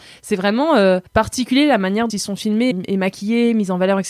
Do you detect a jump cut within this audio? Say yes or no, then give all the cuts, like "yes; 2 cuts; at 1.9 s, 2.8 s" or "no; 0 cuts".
yes; 3 cuts; at 1.1 s, 2.1 s, 2.7 s